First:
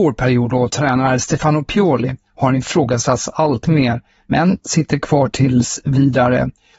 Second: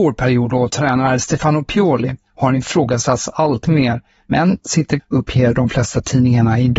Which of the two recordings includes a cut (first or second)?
second